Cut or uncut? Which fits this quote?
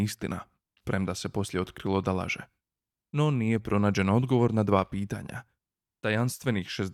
cut